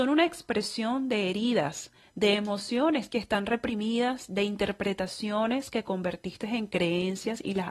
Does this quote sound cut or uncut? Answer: uncut